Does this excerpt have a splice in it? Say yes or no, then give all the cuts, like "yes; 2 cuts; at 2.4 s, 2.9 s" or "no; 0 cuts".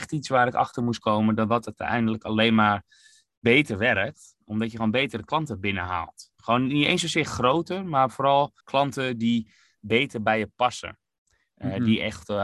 yes; 1 cut; at 8.6 s